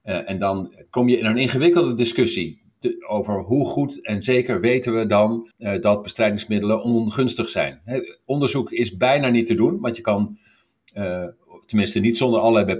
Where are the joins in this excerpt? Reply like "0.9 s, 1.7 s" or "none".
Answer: 5.5 s